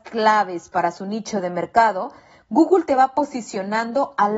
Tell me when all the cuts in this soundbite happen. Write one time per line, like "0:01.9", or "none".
none